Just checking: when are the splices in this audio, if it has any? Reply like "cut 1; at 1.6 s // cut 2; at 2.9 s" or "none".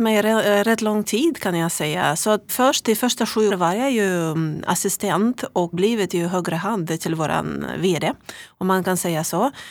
cut 1; at 2.5 s // cut 2; at 3.5 s // cut 3; at 5.7 s

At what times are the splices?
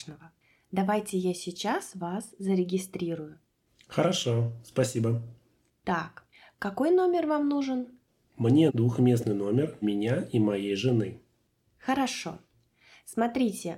cut 1; at 8.7 s // cut 2; at 9.8 s

